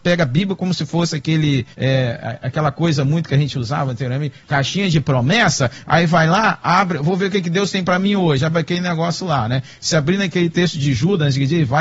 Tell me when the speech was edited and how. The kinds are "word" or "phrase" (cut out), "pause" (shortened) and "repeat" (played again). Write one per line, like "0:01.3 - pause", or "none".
0:01.7 - pause
0:04.4 - pause